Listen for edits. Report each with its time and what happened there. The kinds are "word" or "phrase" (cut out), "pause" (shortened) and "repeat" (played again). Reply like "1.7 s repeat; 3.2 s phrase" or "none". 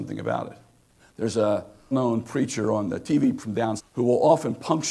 1.0 s pause; 1.9 s word; 3.4 s word; 3.8 s word